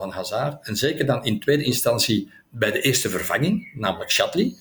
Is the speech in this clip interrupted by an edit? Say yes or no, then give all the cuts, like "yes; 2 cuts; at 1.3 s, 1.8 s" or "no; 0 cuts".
no; 0 cuts